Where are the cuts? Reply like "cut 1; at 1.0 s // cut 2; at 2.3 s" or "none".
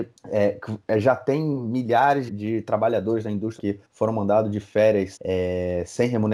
cut 1; at 2.3 s // cut 2; at 3.6 s // cut 3; at 5.2 s